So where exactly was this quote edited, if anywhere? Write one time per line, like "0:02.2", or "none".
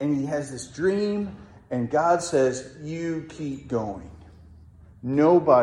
none